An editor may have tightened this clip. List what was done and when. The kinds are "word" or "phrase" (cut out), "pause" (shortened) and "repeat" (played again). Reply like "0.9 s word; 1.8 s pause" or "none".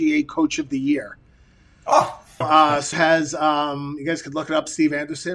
2.4 s word; 2.9 s word